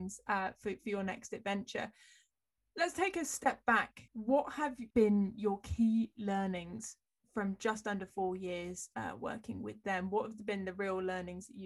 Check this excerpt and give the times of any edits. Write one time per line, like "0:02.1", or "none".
0:04.1
0:04.9